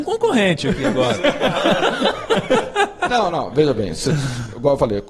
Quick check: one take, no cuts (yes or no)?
yes